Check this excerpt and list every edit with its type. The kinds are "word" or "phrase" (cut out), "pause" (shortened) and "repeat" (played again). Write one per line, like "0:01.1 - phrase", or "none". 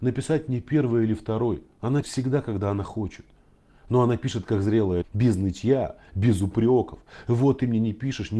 0:02.0 - word
0:05.0 - word